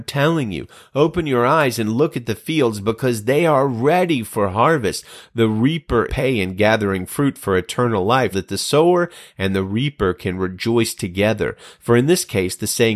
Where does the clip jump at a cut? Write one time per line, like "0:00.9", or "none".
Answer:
0:06.1
0:08.3